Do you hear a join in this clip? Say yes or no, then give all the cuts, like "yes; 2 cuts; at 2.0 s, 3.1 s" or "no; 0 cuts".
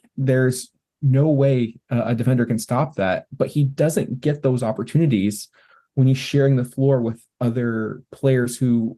no; 0 cuts